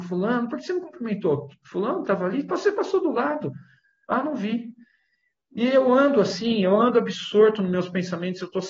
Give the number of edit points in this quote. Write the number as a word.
zero